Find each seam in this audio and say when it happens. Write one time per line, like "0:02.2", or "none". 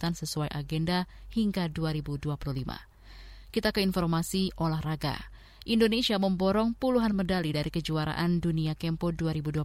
none